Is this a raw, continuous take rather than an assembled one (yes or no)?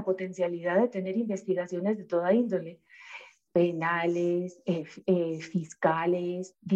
yes